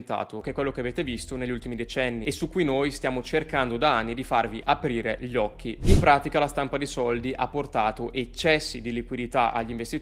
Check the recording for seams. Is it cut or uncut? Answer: uncut